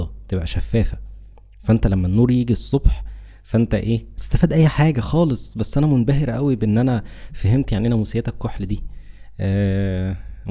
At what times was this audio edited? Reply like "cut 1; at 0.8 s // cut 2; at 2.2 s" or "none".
cut 1; at 4.2 s